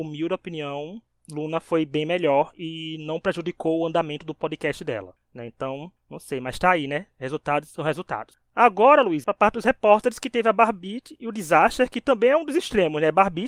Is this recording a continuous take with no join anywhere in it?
no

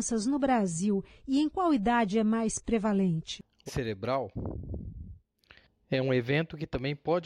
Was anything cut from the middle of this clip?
yes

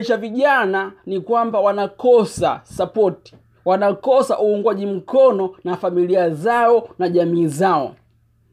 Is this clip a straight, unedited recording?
yes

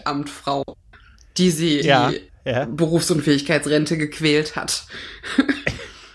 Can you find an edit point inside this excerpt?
yes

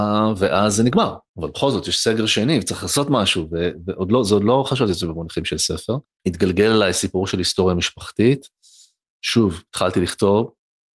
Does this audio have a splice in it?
yes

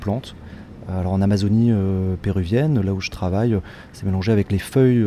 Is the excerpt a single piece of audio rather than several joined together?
yes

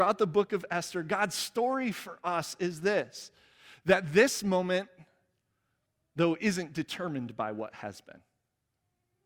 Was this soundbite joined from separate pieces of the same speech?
no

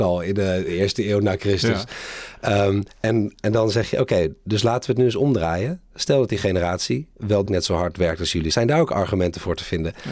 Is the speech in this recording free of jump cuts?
no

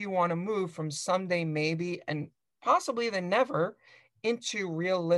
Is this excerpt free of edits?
yes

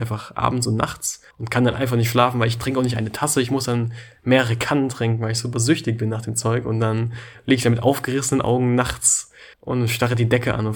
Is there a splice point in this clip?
yes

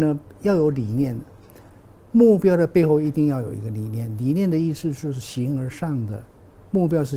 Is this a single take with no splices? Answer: yes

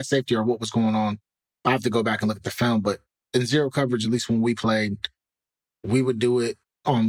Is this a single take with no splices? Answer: yes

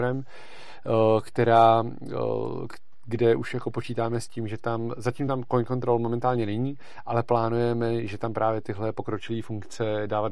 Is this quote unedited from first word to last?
yes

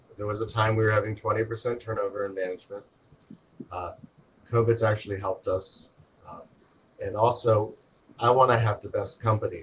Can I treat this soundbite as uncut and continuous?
yes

